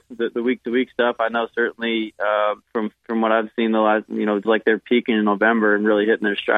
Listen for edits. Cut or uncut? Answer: cut